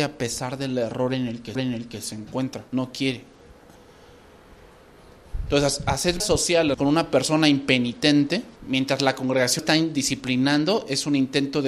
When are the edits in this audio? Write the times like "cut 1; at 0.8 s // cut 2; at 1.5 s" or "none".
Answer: cut 1; at 1.5 s // cut 2; at 2.7 s // cut 3; at 6.2 s // cut 4; at 6.7 s // cut 5; at 8.6 s // cut 6; at 9.6 s